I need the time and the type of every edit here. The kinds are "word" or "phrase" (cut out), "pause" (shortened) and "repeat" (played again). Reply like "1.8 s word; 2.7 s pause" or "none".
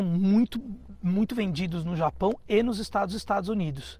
3.1 s repeat